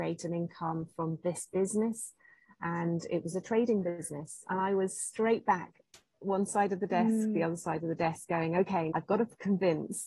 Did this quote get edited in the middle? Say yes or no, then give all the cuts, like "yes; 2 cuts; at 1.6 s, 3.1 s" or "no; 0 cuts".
yes; 1 cut; at 8.9 s